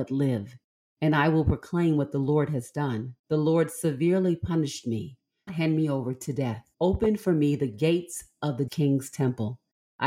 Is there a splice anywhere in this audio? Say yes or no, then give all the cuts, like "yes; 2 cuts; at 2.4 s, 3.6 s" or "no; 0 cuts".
yes; 4 cuts; at 3.2 s, 5.5 s, 6.7 s, 8.7 s